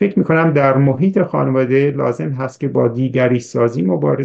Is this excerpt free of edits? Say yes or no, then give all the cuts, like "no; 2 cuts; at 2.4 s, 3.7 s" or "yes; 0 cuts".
yes; 0 cuts